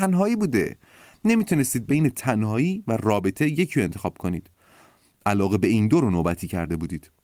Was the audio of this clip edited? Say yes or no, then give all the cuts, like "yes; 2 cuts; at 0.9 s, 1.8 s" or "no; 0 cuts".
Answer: no; 0 cuts